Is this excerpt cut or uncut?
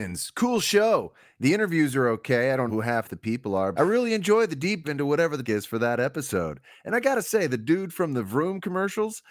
cut